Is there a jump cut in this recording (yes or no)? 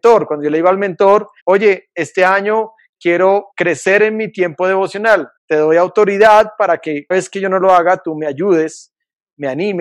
yes